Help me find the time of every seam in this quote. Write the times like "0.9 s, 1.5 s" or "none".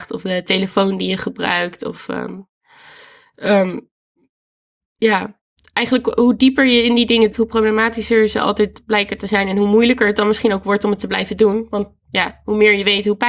7.3 s